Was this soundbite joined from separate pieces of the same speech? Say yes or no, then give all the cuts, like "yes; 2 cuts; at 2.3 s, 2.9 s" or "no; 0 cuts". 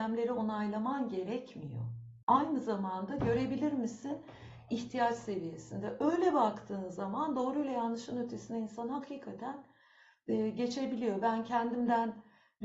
yes; 1 cut; at 2.2 s